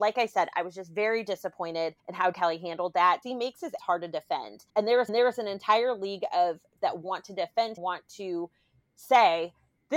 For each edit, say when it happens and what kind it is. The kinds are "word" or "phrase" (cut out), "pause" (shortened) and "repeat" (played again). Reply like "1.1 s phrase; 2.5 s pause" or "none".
2.0 s pause; 2.3 s word; 3.2 s word; 3.8 s word; 4.7 s pause; 5.1 s repeat; 6.8 s word; 7.8 s phrase